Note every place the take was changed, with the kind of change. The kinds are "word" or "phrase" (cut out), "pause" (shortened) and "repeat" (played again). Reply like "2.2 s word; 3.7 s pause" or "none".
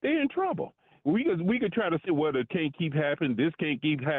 2.1 s word; 2.5 s word